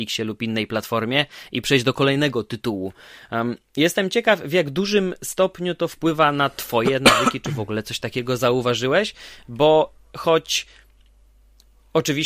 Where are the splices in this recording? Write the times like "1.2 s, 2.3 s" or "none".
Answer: none